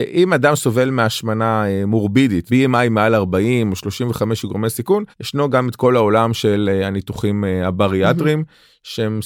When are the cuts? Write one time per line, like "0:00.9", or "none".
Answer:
0:02.5
0:05.1